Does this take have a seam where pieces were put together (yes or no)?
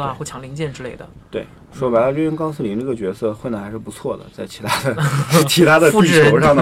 no